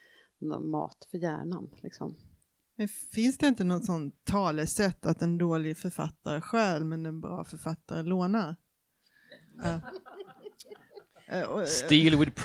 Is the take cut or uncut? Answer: cut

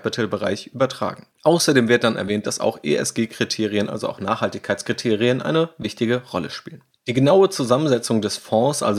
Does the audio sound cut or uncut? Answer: uncut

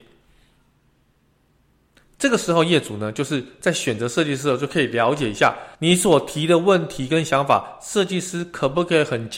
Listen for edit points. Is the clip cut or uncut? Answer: cut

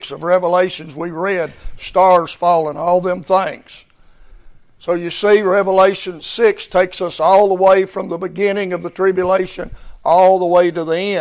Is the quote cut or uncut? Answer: uncut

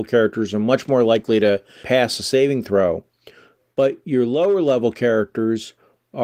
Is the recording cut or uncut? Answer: cut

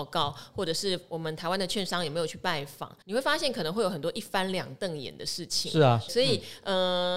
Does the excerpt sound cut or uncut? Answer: cut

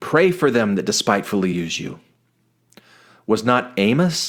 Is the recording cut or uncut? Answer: uncut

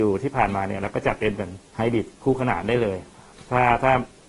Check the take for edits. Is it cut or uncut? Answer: cut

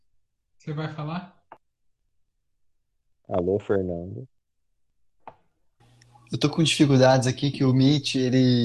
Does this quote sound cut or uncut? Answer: uncut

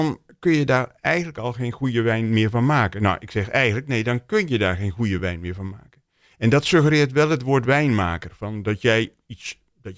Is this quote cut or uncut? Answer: uncut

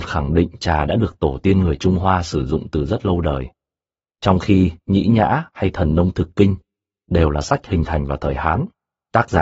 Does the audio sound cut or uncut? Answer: uncut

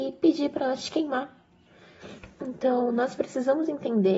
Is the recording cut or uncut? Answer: uncut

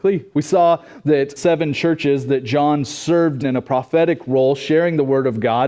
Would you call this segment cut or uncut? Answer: cut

